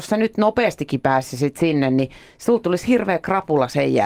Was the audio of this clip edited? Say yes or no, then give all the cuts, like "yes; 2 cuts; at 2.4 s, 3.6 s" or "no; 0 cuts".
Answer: no; 0 cuts